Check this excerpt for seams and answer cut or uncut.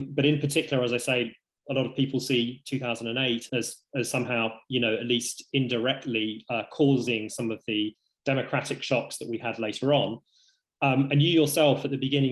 cut